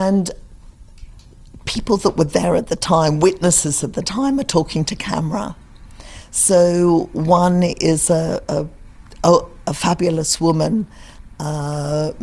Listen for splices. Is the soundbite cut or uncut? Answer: uncut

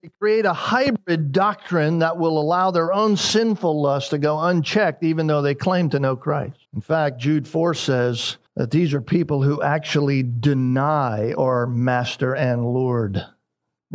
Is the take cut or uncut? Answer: cut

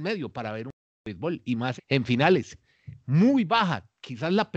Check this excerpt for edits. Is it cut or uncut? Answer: cut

